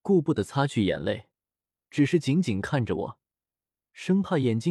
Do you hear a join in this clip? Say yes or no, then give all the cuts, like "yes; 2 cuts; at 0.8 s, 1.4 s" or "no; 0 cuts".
no; 0 cuts